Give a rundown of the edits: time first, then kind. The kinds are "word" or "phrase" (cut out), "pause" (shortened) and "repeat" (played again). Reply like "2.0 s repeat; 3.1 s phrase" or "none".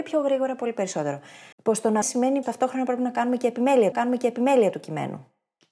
1.5 s pause; 2.0 s word; 2.4 s word; 3.9 s repeat